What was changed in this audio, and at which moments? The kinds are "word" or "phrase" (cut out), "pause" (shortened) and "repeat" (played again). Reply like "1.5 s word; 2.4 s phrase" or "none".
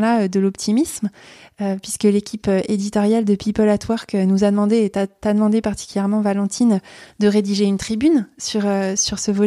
none